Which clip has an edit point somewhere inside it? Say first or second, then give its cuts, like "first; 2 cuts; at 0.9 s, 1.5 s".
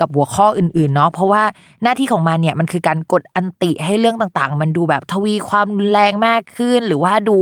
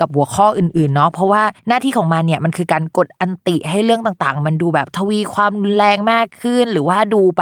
second; 1 cut; at 1.6 s